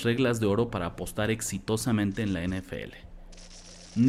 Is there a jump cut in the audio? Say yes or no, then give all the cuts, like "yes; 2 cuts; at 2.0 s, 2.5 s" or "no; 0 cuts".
no; 0 cuts